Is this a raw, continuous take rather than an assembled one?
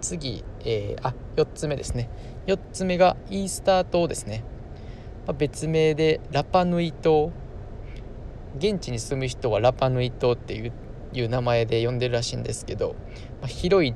no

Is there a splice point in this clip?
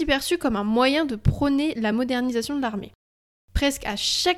no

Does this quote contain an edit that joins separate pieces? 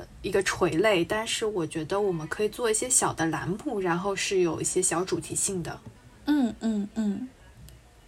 yes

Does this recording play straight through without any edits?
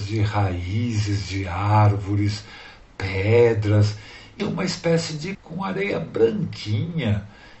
no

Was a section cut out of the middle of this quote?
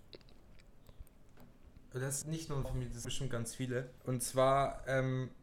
yes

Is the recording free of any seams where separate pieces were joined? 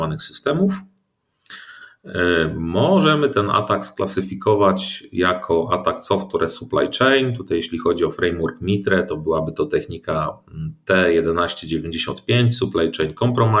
yes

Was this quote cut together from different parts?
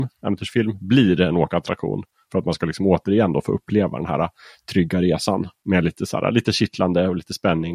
no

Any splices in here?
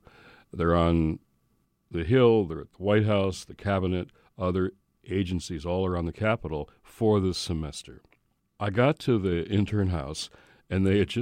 no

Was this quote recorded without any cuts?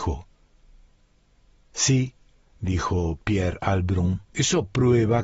no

